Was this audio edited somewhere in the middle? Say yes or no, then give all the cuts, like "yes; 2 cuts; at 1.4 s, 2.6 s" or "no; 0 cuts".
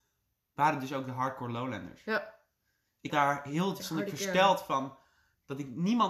yes; 2 cuts; at 3.1 s, 3.8 s